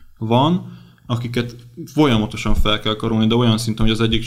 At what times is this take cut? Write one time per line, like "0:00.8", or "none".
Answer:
none